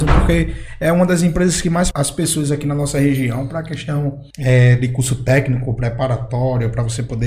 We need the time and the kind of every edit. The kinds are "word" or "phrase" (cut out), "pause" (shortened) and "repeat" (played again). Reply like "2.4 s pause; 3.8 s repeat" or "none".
1.9 s word; 4.3 s pause